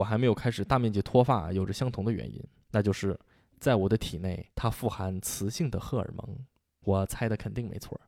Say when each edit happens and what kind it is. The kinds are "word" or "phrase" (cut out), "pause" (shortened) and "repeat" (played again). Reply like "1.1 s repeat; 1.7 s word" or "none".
4.5 s pause; 6.8 s word